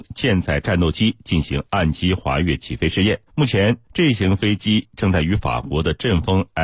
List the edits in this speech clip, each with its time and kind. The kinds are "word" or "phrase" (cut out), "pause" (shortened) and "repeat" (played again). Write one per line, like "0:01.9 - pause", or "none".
0:03.3 - pause
0:03.8 - pause